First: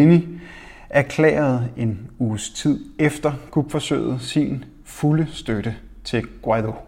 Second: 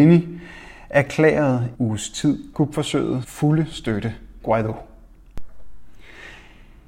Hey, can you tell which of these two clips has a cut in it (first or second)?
second